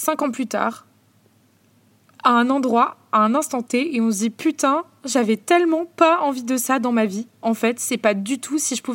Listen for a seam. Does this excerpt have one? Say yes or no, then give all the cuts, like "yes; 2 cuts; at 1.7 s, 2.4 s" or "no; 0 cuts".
no; 0 cuts